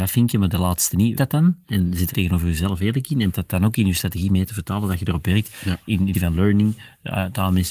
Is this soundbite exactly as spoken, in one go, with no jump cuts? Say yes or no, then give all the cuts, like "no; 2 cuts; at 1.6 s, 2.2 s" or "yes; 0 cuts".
no; 4 cuts; at 1.1 s, 2.1 s, 3.3 s, 6.1 s